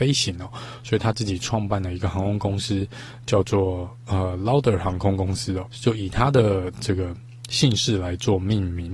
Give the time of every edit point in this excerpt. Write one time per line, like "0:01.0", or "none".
0:05.7